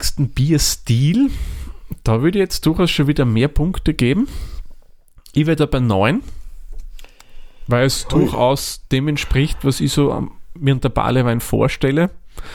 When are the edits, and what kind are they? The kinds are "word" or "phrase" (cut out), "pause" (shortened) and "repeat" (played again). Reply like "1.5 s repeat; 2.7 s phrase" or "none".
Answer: none